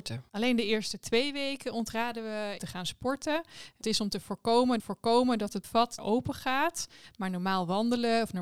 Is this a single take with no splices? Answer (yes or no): no